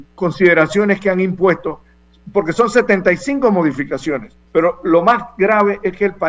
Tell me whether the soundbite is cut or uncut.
cut